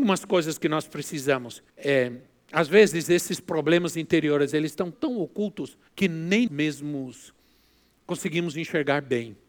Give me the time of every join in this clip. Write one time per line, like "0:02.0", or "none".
0:01.7
0:04.9
0:05.9
0:06.5